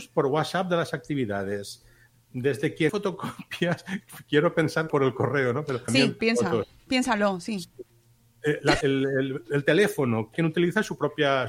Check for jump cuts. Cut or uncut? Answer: cut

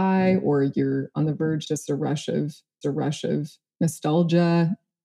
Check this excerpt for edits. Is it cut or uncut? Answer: cut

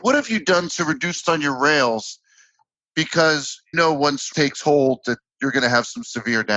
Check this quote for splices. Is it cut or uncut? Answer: cut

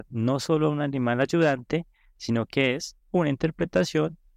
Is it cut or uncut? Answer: uncut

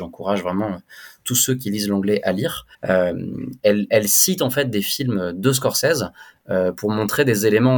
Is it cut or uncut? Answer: cut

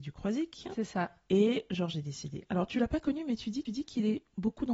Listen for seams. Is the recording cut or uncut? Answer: cut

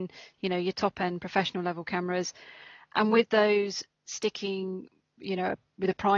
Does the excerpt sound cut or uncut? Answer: uncut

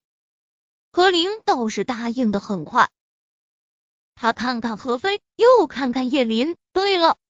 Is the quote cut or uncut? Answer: uncut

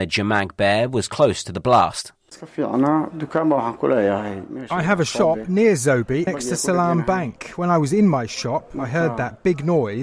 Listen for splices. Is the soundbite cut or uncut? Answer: cut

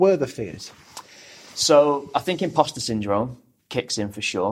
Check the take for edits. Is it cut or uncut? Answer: uncut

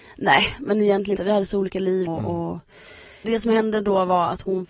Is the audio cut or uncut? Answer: cut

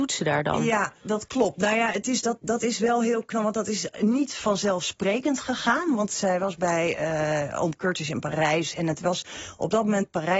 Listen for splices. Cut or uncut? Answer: uncut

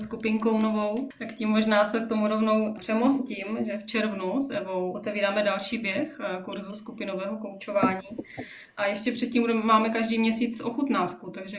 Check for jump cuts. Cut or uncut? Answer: uncut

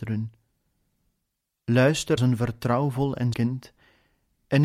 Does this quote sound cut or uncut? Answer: cut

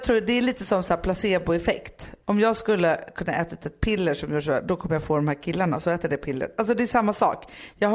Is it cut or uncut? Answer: uncut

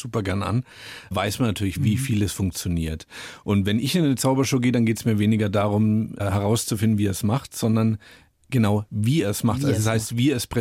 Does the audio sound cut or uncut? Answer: uncut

